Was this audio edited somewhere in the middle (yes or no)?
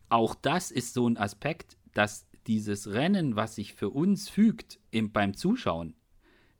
yes